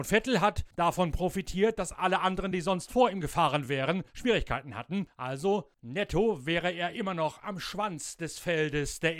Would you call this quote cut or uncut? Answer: uncut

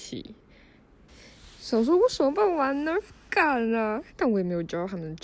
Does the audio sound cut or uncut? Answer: cut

